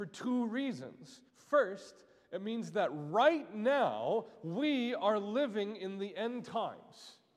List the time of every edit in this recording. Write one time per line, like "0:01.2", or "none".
0:01.3